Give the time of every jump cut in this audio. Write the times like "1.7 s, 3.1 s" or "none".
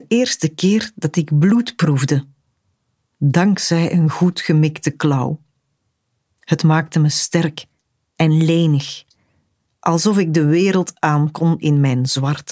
none